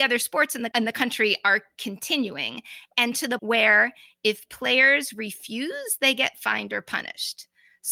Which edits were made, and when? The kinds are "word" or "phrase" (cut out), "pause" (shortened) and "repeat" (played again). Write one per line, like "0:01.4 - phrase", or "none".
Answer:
0:03.4 - word